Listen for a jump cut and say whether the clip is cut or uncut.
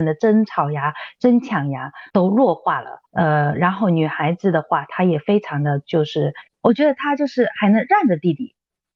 cut